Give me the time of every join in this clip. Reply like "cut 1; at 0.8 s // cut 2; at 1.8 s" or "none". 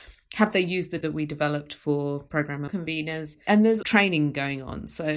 cut 1; at 1.0 s // cut 2; at 2.7 s // cut 3; at 3.8 s